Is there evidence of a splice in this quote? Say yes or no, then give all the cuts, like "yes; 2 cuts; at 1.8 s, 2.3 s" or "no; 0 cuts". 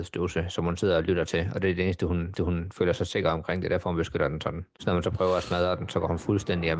yes; 1 cut; at 2.4 s